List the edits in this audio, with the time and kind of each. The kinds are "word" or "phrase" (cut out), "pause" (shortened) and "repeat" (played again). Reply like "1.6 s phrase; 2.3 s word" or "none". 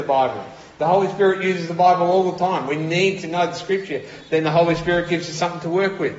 none